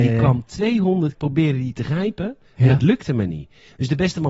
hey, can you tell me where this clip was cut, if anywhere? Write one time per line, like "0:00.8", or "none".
0:01.1